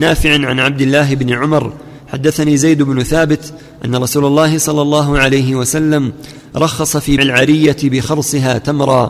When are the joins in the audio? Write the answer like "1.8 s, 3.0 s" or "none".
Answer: 7.2 s